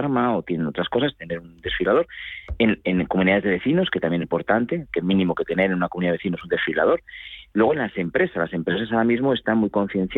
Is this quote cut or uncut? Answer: cut